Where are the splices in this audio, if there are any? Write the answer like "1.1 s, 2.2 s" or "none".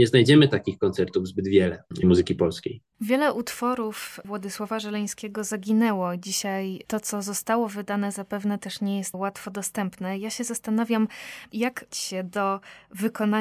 2.0 s, 9.1 s, 11.9 s